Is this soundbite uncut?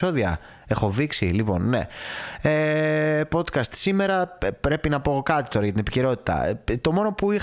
yes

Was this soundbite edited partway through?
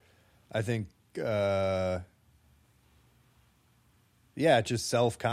no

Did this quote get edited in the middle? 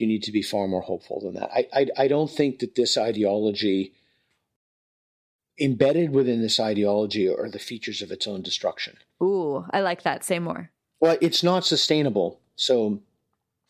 no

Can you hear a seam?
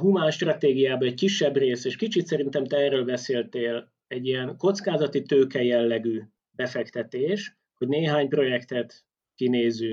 no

